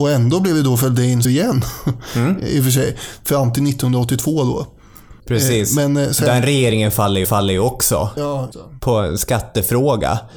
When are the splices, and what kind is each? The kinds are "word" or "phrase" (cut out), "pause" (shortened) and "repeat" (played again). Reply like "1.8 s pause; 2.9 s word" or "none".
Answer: 1.2 s word; 5.2 s pause; 7.2 s repeat; 8.5 s word